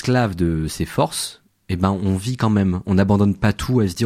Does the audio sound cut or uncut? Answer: uncut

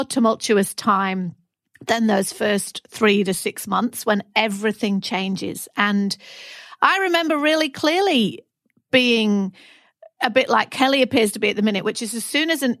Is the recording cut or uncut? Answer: uncut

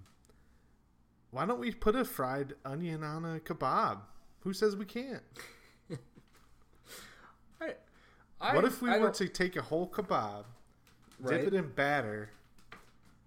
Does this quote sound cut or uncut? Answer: uncut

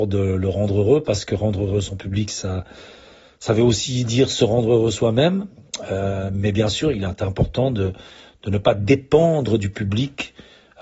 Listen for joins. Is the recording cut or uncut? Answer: uncut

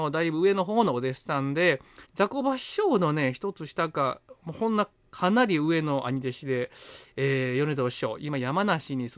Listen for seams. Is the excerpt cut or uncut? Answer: cut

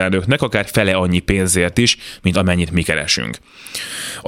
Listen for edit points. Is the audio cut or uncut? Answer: uncut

